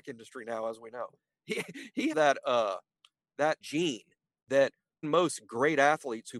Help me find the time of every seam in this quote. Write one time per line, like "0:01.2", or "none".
0:02.1
0:03.6
0:05.0